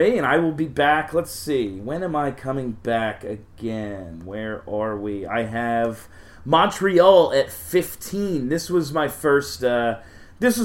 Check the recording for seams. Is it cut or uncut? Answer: uncut